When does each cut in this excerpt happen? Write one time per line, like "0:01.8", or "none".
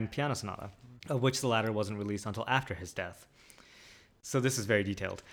0:01.0